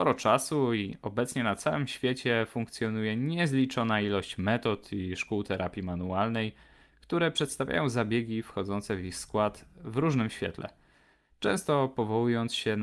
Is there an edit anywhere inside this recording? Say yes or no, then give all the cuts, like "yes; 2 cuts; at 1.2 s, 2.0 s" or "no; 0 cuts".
no; 0 cuts